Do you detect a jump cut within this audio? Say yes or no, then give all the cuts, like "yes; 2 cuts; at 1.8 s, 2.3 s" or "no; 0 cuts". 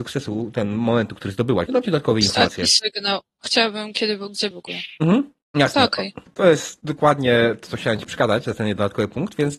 yes; 4 cuts; at 1.7 s, 4.5 s, 5.4 s, 6.3 s